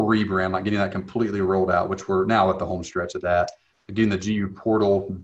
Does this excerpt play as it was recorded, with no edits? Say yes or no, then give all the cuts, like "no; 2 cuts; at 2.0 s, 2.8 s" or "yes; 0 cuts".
yes; 0 cuts